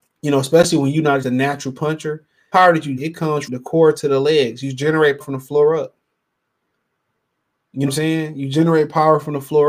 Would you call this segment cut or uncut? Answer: cut